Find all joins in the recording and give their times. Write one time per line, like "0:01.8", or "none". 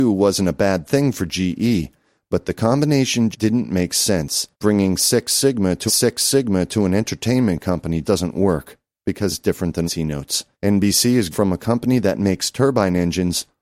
0:03.3
0:04.5
0:05.9
0:08.0
0:09.3
0:09.9
0:10.5
0:11.3